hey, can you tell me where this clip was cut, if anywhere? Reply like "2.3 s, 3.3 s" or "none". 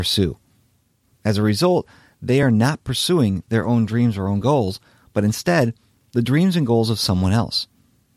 none